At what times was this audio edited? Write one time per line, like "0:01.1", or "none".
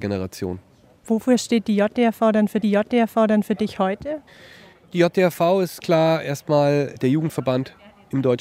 0:02.6
0:05.8